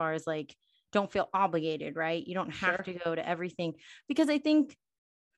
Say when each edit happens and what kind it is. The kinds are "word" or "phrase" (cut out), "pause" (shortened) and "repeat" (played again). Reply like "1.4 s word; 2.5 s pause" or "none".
none